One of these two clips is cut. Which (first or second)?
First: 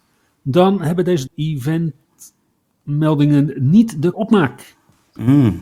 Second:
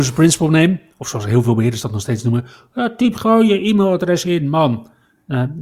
first